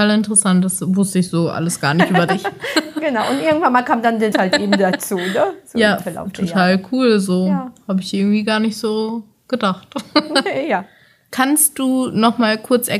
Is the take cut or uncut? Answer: cut